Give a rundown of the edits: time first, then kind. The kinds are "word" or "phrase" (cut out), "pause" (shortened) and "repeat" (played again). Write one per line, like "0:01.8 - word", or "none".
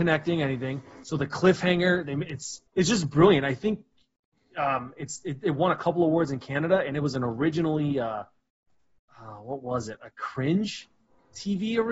0:02.7 - pause